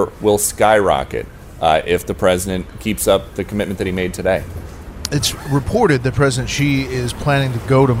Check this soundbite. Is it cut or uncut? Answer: uncut